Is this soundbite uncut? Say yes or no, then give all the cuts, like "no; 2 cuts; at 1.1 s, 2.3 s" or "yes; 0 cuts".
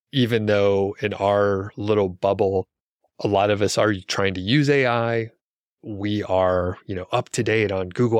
yes; 0 cuts